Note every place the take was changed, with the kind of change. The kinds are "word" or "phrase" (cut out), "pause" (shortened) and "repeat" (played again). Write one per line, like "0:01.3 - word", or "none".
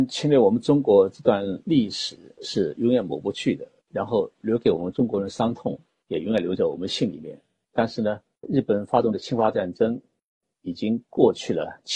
0:08.4 - word